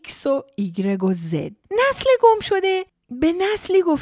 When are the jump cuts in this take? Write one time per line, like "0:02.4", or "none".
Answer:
0:01.6